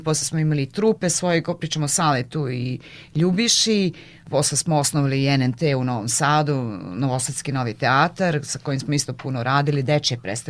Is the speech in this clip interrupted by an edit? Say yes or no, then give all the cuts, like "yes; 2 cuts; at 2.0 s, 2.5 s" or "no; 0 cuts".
no; 0 cuts